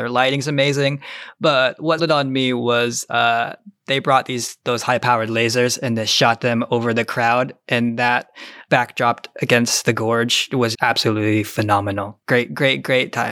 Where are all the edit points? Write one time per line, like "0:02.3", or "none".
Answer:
0:02.0
0:08.7
0:10.7